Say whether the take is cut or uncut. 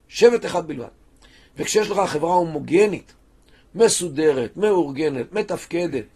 uncut